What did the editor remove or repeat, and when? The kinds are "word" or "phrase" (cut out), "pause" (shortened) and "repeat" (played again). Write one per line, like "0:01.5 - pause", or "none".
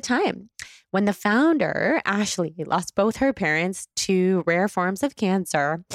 none